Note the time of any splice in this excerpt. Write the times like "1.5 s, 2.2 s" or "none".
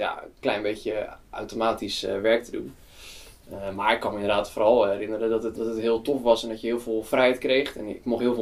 5.6 s